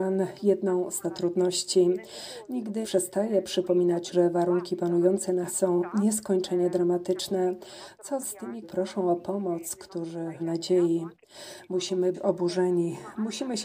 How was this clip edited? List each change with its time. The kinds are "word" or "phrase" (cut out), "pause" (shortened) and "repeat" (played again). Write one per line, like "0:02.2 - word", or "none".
0:01.0 - word
0:02.8 - word
0:04.1 - word
0:05.5 - word
0:08.2 - word
0:08.6 - word
0:10.4 - word
0:12.1 - word